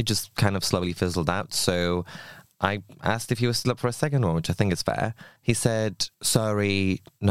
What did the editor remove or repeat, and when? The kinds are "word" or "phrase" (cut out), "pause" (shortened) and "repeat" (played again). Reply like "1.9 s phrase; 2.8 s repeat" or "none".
5.4 s pause; 6.1 s pause